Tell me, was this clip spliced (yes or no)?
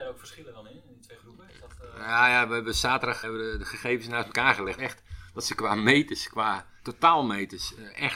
yes